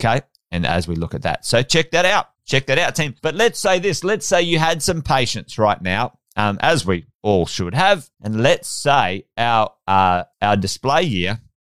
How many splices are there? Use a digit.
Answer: 5